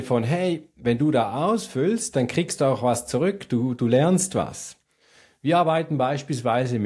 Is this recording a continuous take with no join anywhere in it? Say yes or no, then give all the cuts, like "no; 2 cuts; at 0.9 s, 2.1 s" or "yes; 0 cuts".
yes; 0 cuts